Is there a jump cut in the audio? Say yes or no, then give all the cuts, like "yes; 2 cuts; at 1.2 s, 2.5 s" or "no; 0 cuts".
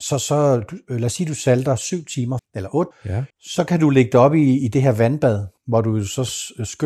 yes; 4 cuts; at 2.4 s, 2.9 s, 3.3 s, 5.6 s